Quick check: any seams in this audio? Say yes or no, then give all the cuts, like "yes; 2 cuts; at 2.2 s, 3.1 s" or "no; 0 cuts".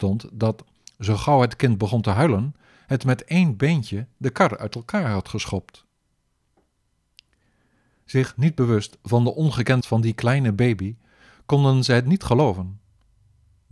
yes; 1 cut; at 9.8 s